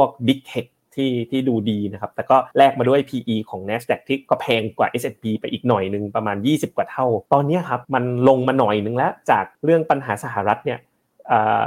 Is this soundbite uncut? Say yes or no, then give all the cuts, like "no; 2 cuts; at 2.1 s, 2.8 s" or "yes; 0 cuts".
no; 4 cuts; at 2.5 s, 7.3 s, 7.8 s, 9.5 s